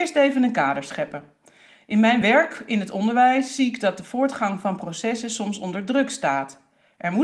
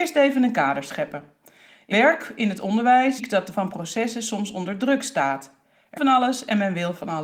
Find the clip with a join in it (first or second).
second